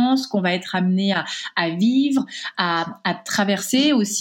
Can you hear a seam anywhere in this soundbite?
no; 0 cuts

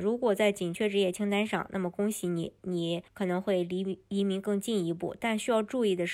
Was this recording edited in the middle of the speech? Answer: yes; 1 cut; at 3.1 s

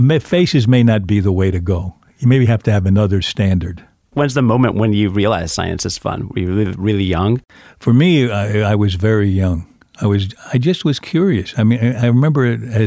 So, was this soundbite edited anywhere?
no; 0 cuts

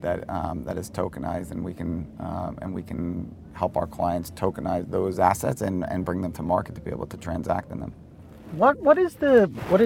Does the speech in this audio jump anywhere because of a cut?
no; 0 cuts

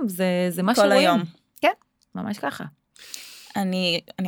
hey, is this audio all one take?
yes; 0 cuts

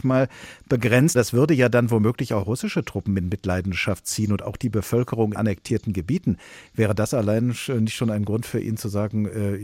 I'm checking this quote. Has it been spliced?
yes; 2 cuts; at 1.1 s, 5.3 s

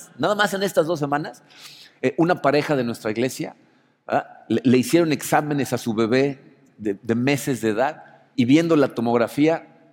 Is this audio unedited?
no; 1 cut; at 8.3 s

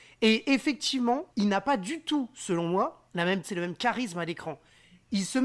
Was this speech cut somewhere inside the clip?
yes; 3 cuts; at 1.3 s, 3.1 s, 3.4 s

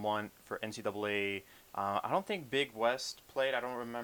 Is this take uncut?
yes; 0 cuts

